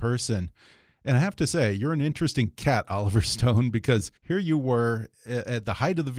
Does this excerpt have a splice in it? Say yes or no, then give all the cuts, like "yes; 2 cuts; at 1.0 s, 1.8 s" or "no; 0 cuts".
yes; 1 cut; at 4.2 s